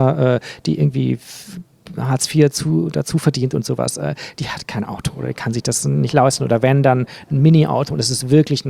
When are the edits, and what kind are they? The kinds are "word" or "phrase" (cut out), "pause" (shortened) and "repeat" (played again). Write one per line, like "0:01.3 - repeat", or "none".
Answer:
none